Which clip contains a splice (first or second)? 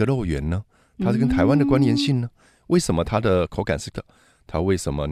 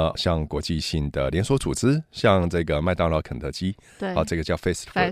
first